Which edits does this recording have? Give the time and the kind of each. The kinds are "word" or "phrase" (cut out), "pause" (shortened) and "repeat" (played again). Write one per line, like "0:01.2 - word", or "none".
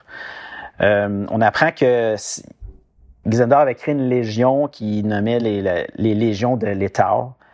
none